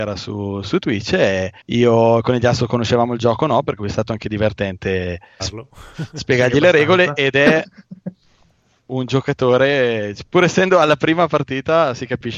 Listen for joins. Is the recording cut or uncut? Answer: cut